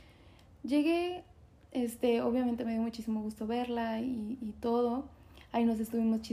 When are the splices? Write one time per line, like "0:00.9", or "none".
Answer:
none